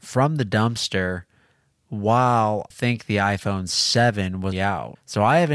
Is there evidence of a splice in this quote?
yes; 2 cuts; at 2.7 s, 4.5 s

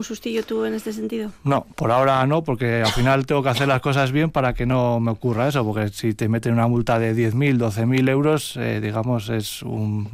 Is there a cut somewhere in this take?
no; 0 cuts

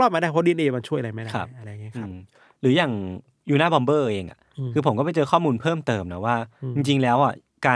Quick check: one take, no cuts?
yes; 0 cuts

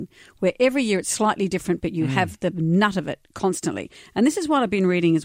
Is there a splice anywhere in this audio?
no; 0 cuts

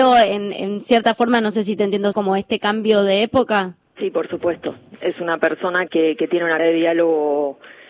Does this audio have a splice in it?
yes; 4 cuts; at 2.1 s, 3.8 s, 5.9 s, 6.6 s

